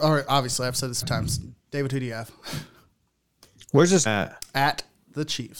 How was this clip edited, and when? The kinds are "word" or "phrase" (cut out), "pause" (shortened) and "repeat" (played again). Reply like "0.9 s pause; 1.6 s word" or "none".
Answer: 1.0 s word; 4.1 s word